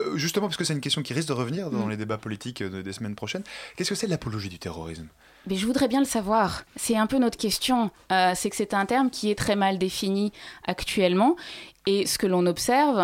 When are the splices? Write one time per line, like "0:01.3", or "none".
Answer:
0:06.7